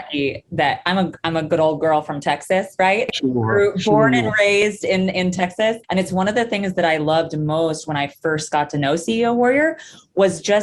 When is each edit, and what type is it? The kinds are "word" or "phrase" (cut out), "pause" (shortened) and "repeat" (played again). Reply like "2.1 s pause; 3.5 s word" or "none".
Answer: 5.8 s pause